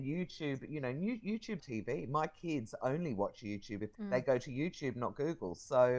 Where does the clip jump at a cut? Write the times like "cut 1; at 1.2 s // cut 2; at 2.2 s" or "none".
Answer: cut 1; at 1.6 s // cut 2; at 3.9 s